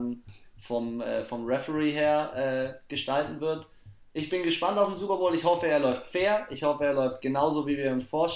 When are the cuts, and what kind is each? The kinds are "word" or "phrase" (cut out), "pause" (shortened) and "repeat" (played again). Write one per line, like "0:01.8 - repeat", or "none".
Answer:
none